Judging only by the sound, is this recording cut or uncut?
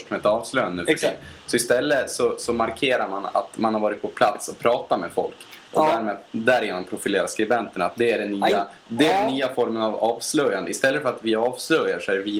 uncut